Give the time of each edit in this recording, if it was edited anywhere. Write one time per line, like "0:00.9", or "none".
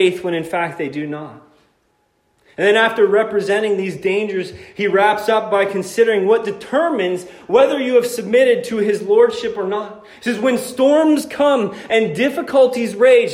none